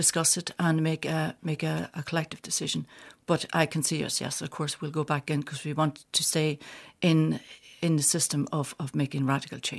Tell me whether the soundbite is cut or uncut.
uncut